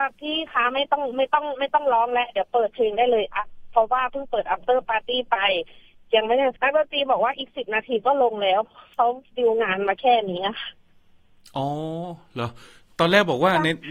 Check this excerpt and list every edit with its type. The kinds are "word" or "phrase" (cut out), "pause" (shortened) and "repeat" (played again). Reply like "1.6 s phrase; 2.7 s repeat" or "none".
6.6 s pause